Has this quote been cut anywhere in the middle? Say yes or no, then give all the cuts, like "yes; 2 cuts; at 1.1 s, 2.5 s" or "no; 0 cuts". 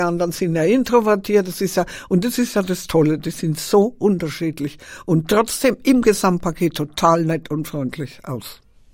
no; 0 cuts